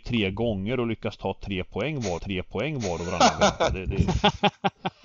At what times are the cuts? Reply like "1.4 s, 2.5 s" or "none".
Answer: 2.2 s

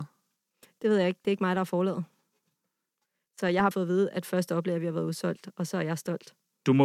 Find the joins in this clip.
3.7 s

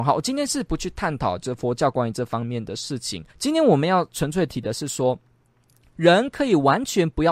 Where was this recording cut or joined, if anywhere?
3.3 s

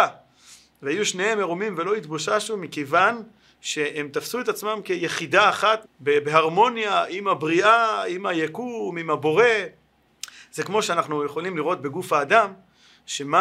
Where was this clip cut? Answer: 5.8 s

